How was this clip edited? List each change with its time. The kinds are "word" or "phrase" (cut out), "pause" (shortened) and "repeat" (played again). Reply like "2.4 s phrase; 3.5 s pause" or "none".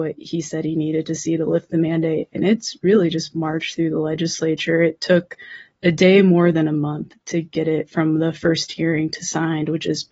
none